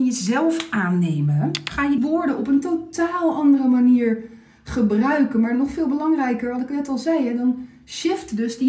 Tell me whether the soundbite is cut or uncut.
cut